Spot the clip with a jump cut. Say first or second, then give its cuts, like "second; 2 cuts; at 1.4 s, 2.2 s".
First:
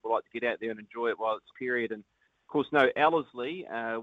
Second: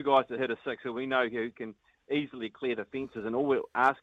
first; 1 cut; at 1.5 s